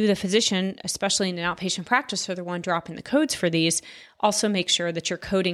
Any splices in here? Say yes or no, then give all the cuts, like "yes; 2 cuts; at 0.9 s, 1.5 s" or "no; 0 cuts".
no; 0 cuts